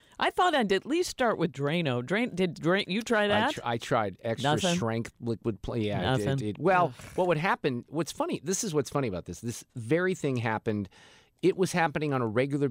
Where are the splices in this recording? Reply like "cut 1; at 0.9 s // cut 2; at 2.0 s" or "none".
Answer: none